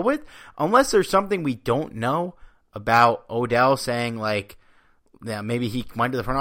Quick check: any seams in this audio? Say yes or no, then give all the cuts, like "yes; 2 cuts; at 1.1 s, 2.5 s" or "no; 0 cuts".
no; 0 cuts